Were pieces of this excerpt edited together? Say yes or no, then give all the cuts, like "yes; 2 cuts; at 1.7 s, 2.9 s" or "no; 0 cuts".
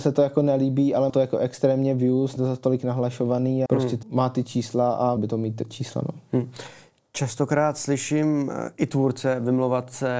yes; 5 cuts; at 1.1 s, 2.4 s, 3.7 s, 4.0 s, 5.2 s